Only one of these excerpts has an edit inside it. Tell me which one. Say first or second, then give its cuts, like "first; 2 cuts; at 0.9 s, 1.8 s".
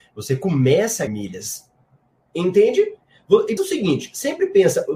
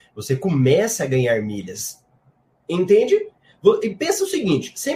first; 2 cuts; at 1.1 s, 3.6 s